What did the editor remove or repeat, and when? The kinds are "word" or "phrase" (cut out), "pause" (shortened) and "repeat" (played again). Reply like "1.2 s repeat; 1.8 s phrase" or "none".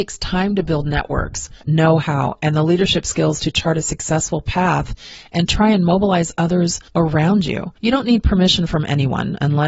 1.6 s pause; 6.9 s pause; 7.8 s pause